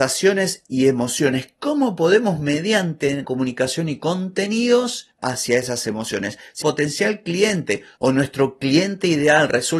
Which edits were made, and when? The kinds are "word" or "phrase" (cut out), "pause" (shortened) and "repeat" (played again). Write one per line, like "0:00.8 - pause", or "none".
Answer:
0:03.2 - word
0:05.2 - word
0:06.6 - word